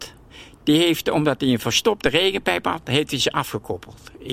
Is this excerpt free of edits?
yes; 0 cuts

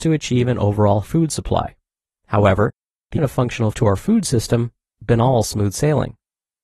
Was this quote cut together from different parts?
yes; 4 cuts; at 1.0 s, 3.2 s, 3.7 s, 5.0 s

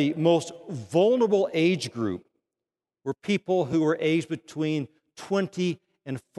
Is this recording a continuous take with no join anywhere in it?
yes; 0 cuts

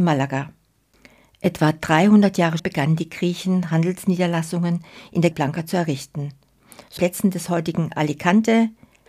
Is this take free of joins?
no; 3 cuts; at 2.6 s, 5.3 s, 7.0 s

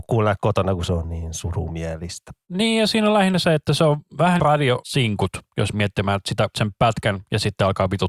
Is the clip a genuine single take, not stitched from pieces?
no; 3 cuts; at 4.4 s, 5.7 s, 6.5 s

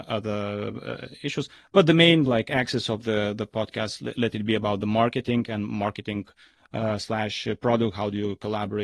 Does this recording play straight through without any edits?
yes; 0 cuts

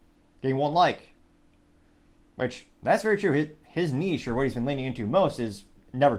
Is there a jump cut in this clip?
no; 0 cuts

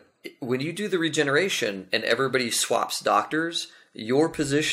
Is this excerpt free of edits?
yes; 0 cuts

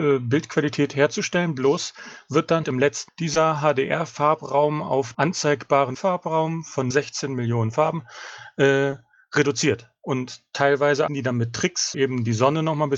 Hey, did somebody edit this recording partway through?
yes; 7 cuts; at 2.6 s, 3.1 s, 5.1 s, 5.9 s, 6.9 s, 11.1 s, 11.9 s

